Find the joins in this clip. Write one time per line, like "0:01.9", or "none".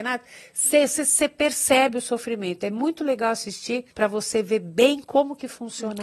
0:03.9